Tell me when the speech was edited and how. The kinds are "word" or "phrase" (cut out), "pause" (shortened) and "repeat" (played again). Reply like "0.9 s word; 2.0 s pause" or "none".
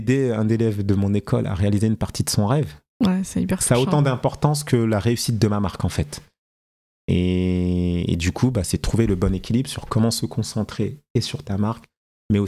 none